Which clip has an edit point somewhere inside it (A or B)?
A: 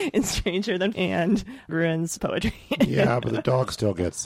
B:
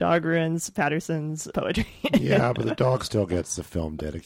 A